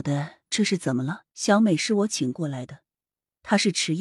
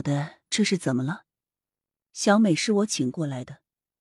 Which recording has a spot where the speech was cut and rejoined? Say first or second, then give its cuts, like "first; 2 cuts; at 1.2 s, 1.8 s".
first; 1 cut; at 1.3 s